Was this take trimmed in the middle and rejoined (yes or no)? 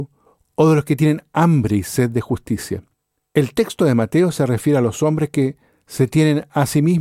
no